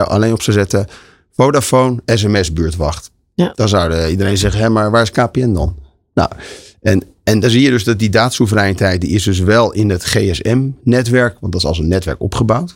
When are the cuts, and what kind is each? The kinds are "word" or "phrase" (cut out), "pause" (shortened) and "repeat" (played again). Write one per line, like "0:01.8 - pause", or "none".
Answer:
none